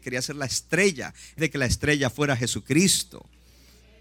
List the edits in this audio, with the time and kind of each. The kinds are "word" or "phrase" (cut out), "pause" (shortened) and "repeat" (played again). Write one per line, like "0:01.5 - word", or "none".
0:01.4 - word